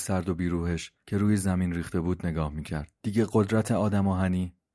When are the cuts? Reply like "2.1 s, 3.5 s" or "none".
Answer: 1.0 s, 3.0 s